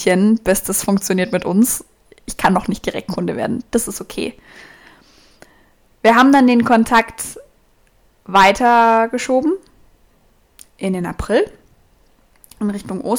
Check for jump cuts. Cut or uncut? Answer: uncut